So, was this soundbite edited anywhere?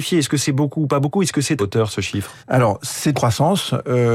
yes; 3 cuts; at 1.6 s, 2.4 s, 3.1 s

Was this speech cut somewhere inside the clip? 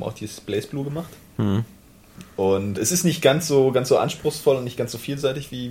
yes; 1 cut; at 2.8 s

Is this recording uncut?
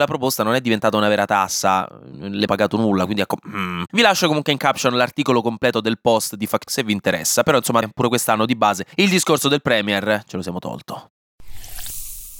no; 4 cuts; at 2.5 s, 6.7 s, 7.8 s, 8.9 s

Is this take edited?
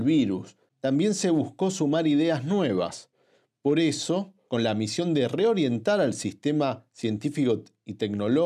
no; 0 cuts

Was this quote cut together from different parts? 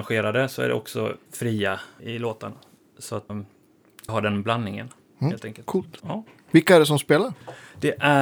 yes; 5 cuts; at 1.3 s, 2.0 s, 3.3 s, 4.1 s, 6.0 s

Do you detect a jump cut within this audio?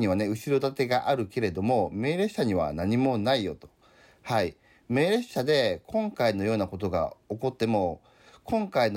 no; 0 cuts

